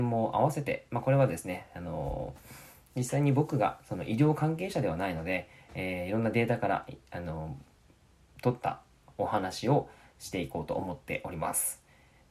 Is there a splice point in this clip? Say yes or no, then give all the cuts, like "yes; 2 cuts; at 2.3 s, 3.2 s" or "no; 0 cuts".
no; 0 cuts